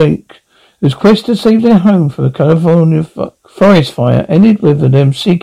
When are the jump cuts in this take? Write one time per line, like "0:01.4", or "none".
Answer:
0:03.4

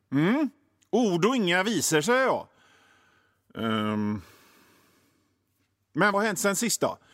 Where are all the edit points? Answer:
0:06.1

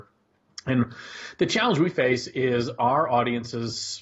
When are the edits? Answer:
none

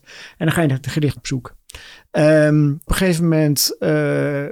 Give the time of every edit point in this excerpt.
0:01.2
0:02.9

